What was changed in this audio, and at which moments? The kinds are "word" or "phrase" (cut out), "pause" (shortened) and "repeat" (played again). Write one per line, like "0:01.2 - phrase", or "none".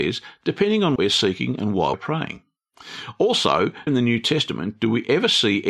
0:01.0 - word
0:01.9 - word
0:03.9 - word